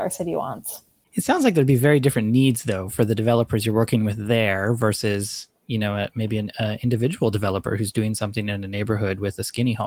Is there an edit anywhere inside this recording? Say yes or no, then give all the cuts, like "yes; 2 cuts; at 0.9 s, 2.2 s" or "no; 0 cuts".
no; 0 cuts